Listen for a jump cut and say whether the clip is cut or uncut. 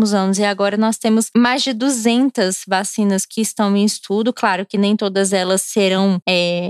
uncut